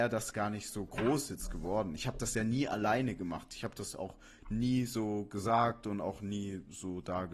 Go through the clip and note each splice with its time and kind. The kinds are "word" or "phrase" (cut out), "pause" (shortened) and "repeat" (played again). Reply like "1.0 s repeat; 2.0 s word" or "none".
none